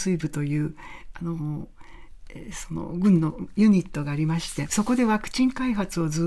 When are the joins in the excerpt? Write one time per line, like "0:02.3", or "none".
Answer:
0:04.7